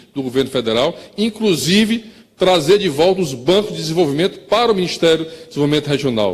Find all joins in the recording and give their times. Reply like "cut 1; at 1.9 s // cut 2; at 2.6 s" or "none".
none

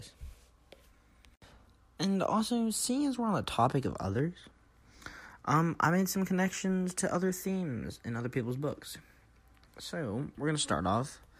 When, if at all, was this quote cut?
none

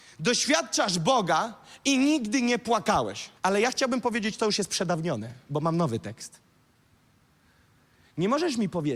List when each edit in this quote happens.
cut 1; at 3.4 s

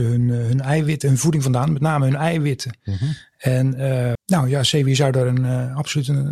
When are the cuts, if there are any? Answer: cut 1; at 4.1 s

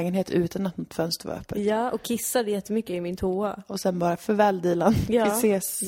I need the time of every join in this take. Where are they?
none

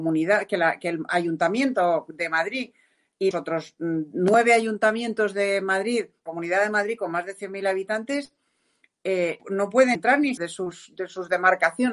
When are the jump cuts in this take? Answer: cut 1; at 3.3 s // cut 2; at 6.3 s // cut 3; at 9.4 s // cut 4; at 10.0 s // cut 5; at 10.4 s

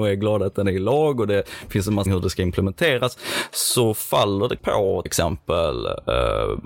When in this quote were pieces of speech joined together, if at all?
cut 1; at 2.1 s // cut 2; at 4.6 s // cut 3; at 5.1 s

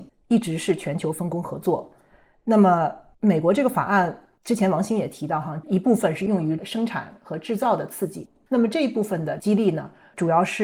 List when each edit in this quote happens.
none

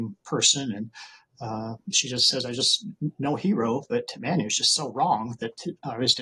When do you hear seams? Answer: none

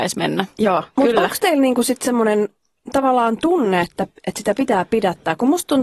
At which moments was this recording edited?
none

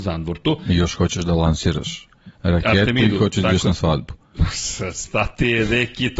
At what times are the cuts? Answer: cut 1; at 2.3 s

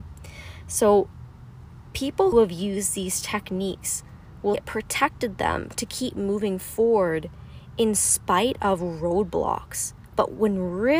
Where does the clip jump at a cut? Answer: cut 1; at 2.3 s // cut 2; at 4.5 s

